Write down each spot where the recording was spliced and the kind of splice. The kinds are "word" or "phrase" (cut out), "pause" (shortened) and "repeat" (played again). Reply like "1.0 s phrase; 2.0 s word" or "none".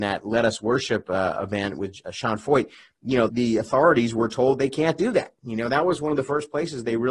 3.3 s word